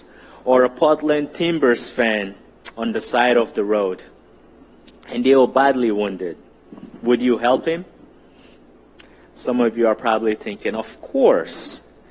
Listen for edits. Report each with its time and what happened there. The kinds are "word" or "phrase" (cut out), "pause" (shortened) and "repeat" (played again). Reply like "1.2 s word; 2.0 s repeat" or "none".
none